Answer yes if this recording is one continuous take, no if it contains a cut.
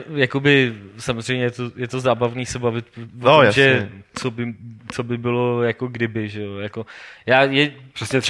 yes